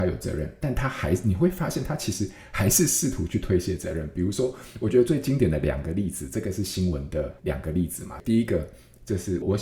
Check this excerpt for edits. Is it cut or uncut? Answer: cut